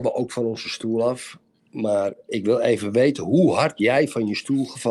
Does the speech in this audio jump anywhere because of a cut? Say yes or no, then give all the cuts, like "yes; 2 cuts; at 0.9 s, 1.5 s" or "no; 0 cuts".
no; 0 cuts